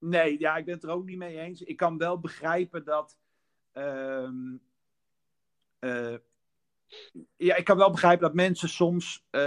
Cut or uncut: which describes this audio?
uncut